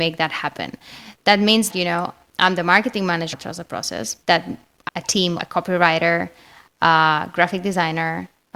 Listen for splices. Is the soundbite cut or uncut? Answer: cut